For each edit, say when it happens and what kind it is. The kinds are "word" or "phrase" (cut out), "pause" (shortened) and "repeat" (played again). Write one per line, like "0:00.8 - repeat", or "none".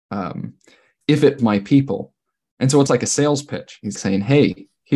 0:01.4 - word
0:02.9 - word
0:04.0 - word

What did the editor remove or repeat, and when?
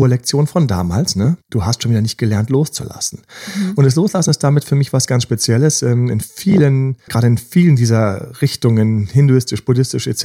0:01.4 - pause
0:07.1 - word

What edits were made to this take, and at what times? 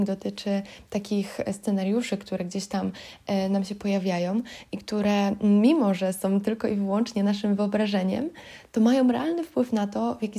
0:01.5 - word

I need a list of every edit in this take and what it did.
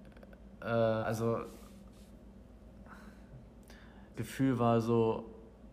0:01.0 - word
0:04.1 - word

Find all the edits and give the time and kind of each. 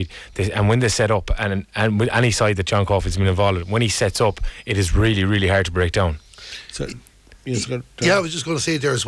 none

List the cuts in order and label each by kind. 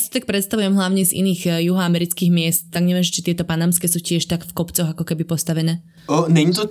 none

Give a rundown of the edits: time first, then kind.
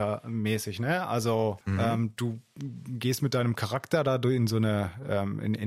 0:01.6 - pause

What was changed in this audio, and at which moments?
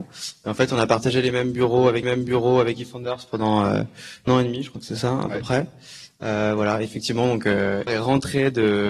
0:02.0 - repeat
0:04.3 - phrase
0:07.9 - word

